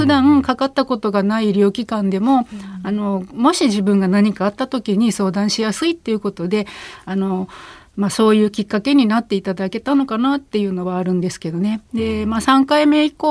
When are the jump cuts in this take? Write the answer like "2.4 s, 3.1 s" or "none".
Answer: none